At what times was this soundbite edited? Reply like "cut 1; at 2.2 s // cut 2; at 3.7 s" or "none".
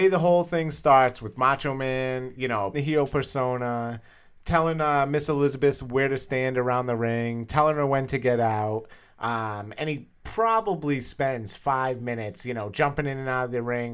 cut 1; at 2.7 s